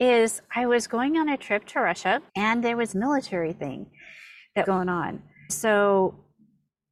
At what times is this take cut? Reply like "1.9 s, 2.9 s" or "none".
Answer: 2.3 s, 2.9 s, 4.6 s, 5.5 s

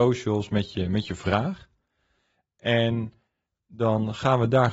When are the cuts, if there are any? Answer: none

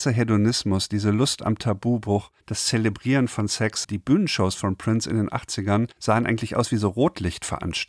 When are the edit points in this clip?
2.4 s, 5.9 s

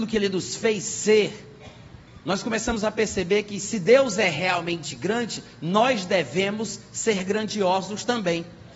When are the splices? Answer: none

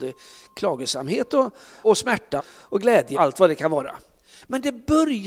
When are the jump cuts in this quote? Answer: 1.8 s, 2.4 s, 3.1 s

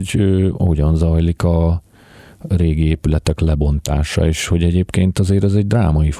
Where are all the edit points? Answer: none

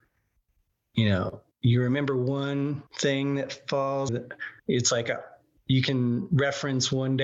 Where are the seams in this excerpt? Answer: 1.5 s, 2.9 s, 4.1 s, 4.6 s

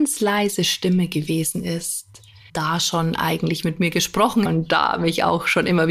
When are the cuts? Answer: 2.5 s, 4.5 s

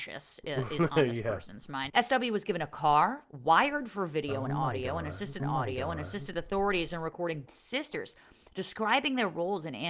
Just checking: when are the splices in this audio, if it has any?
1.9 s, 5.4 s, 7.5 s

